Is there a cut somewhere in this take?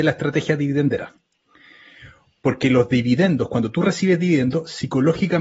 no; 0 cuts

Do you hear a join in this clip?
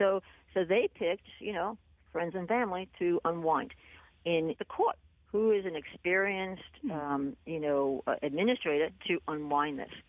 yes; 2 cuts; at 4.6 s, 5.2 s

